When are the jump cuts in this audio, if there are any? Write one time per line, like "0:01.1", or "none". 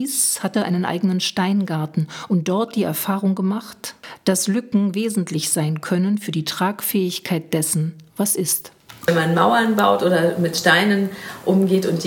none